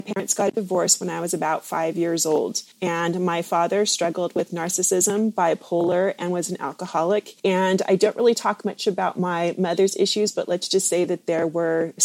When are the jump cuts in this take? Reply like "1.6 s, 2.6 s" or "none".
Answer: 2.7 s, 7.4 s